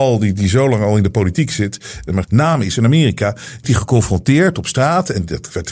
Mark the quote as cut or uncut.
cut